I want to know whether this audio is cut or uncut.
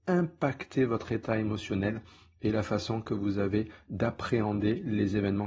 uncut